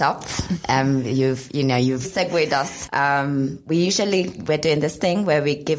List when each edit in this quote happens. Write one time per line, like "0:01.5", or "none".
0:02.0